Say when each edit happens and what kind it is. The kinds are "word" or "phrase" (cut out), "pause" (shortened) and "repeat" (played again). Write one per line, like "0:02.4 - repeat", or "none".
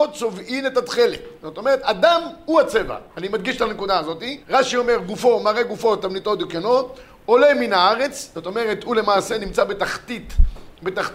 0:03.1 - pause
0:04.4 - pause